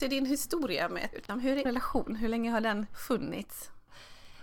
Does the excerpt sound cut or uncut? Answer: cut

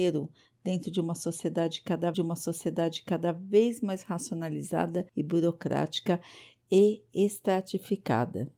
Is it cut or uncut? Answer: cut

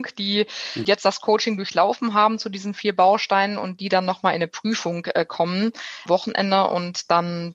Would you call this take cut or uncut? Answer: uncut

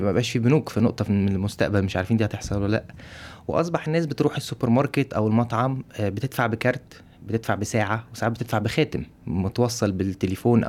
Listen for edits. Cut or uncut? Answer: cut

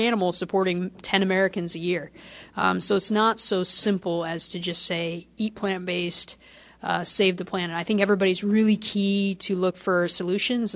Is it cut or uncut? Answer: uncut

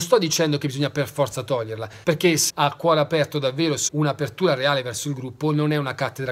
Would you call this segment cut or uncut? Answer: cut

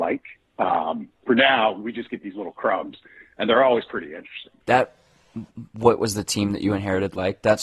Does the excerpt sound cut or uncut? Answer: cut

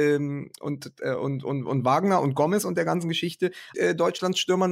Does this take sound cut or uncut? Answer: cut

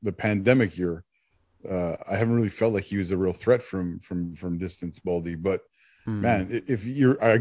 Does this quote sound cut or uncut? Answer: uncut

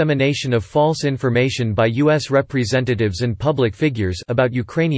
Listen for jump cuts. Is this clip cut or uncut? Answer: uncut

